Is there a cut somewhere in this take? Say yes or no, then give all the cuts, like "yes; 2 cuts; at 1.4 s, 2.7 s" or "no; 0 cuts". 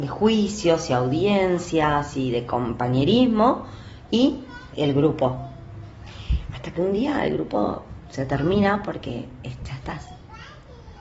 no; 0 cuts